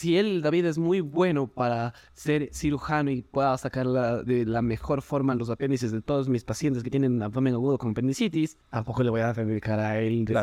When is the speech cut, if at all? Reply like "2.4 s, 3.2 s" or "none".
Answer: 8.6 s